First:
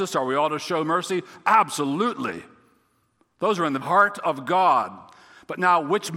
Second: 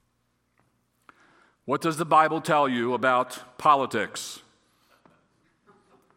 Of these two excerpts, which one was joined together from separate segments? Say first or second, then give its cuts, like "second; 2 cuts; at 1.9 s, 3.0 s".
first; 1 cut; at 3.8 s